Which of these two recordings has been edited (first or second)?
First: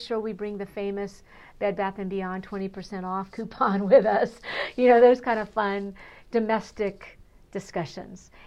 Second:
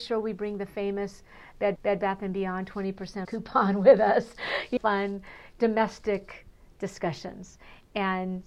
second